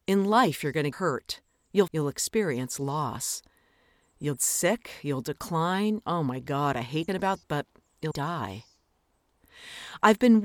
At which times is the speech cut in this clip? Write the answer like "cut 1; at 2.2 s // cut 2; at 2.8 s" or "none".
cut 1; at 0.9 s // cut 2; at 1.9 s // cut 3; at 4.4 s // cut 4; at 6.0 s // cut 5; at 7.1 s // cut 6; at 7.4 s // cut 7; at 8.1 s